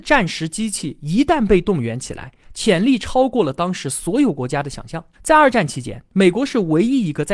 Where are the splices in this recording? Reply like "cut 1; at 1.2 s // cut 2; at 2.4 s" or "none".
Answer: cut 1; at 5.1 s